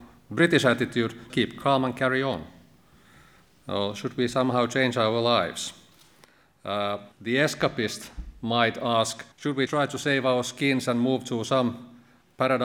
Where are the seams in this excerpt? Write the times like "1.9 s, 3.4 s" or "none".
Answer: 1.3 s, 7.1 s, 9.3 s, 9.7 s